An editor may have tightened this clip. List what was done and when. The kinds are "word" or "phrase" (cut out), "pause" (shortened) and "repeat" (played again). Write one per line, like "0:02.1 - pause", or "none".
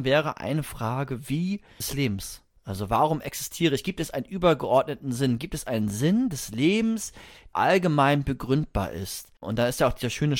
0:01.8 - phrase
0:07.5 - word